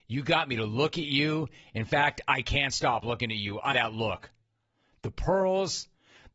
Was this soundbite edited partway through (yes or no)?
yes